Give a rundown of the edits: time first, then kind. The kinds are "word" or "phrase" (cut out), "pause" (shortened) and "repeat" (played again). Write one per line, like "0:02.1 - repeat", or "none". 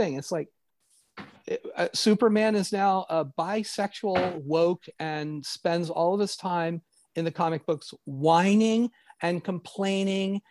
none